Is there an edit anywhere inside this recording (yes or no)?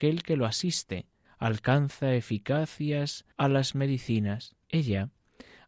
yes